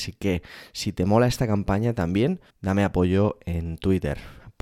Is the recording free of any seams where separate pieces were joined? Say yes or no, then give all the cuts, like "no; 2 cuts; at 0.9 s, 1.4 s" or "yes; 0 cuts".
no; 1 cut; at 2.5 s